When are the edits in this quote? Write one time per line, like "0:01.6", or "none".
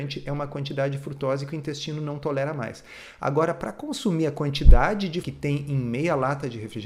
0:05.2